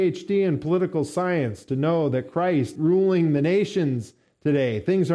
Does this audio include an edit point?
yes; 1 cut; at 2.8 s

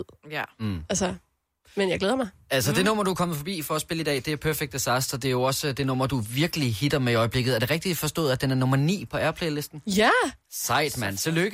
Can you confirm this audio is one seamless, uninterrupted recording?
yes; 0 cuts

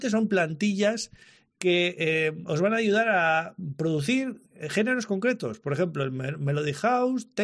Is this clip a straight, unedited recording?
yes; 0 cuts

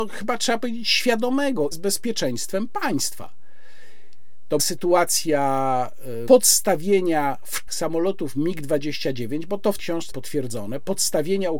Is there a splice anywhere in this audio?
yes; 6 cuts; at 1.7 s, 4.6 s, 6.3 s, 7.7 s, 9.8 s, 10.1 s

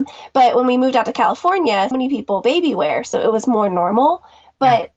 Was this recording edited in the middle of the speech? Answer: yes; 1 cut; at 1.9 s

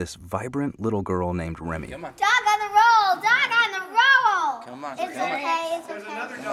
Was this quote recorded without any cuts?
yes; 0 cuts

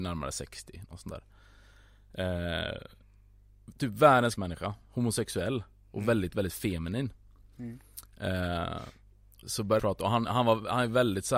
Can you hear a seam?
yes; 3 cuts; at 4.4 s, 9.4 s, 9.8 s

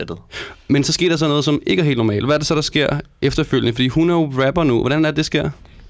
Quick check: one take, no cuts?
yes; 0 cuts

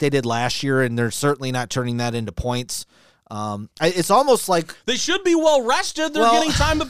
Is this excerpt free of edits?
yes; 0 cuts

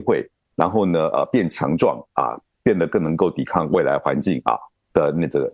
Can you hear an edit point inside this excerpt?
no; 0 cuts

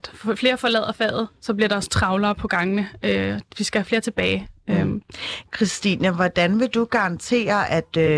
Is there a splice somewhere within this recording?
no; 0 cuts

